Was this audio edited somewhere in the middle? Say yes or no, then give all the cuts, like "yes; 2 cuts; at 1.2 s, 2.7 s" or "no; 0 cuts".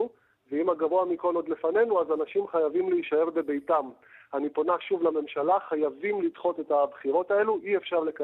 no; 0 cuts